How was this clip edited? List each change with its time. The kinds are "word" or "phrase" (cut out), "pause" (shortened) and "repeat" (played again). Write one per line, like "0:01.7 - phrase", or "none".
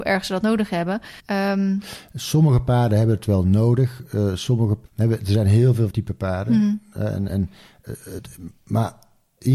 0:01.2 - pause
0:04.9 - pause
0:05.9 - word
0:07.3 - word

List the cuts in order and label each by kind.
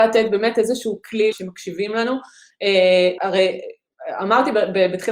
0:01.3 - word
0:03.2 - word

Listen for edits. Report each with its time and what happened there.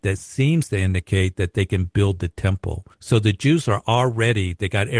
0:02.9 - pause

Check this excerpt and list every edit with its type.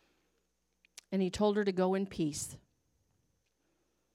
none

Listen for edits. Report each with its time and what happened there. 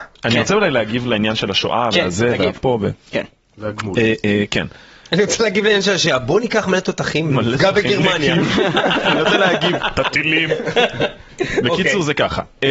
none

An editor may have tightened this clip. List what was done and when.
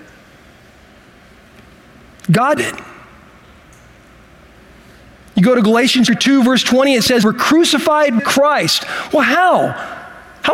0:02.6 - word
0:06.1 - word
0:07.2 - word
0:08.2 - word

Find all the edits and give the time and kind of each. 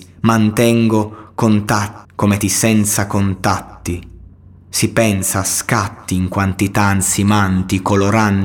0:02.0 - phrase
0:02.4 - word
0:04.3 - pause

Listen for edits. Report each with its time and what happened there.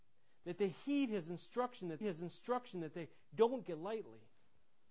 0:02.0 - repeat
0:03.7 - word

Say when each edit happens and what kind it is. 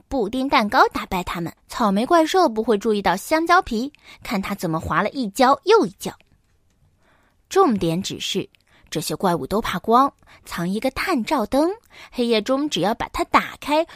0:01.6 - pause

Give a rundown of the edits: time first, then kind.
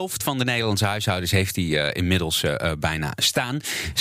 none

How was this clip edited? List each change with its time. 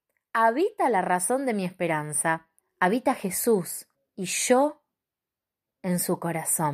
0:02.6 - pause
0:03.9 - pause

